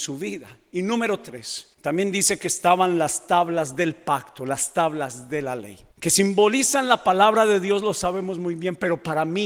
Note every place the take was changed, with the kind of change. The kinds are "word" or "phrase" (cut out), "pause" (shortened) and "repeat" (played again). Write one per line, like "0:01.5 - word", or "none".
0:01.7 - pause
0:05.9 - pause